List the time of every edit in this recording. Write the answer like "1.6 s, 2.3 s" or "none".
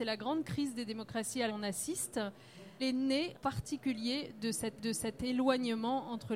1.5 s, 2.8 s, 3.3 s, 4.8 s